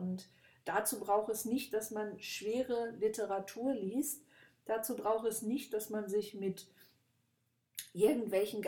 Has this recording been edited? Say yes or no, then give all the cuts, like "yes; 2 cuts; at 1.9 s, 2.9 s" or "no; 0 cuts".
no; 0 cuts